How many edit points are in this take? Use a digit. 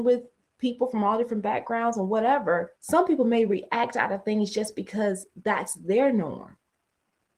1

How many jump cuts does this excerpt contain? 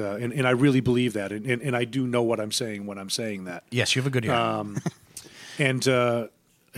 0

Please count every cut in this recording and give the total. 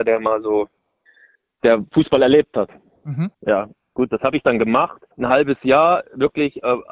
2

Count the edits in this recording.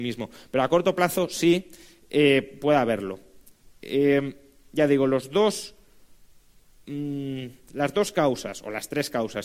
0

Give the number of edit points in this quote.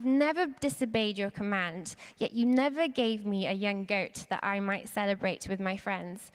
0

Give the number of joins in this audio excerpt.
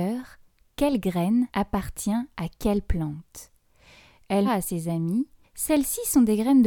3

